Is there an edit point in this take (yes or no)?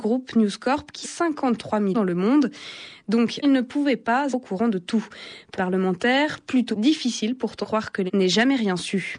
yes